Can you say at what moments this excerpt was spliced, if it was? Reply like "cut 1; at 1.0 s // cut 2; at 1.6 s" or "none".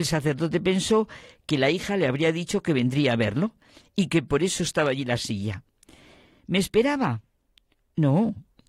none